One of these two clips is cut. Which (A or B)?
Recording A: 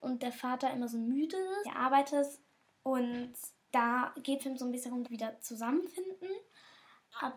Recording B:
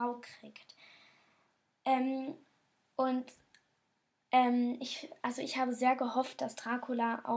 A